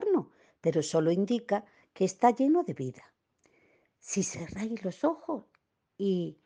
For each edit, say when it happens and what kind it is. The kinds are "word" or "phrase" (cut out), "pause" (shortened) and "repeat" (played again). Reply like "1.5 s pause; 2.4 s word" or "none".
none